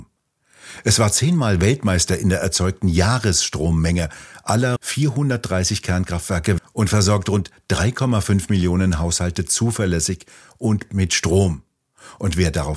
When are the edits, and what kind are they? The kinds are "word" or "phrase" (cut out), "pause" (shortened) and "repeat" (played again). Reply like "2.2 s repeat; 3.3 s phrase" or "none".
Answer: 4.8 s word; 6.6 s word; 10.9 s word